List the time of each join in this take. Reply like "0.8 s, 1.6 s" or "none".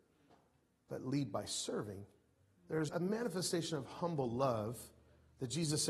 2.9 s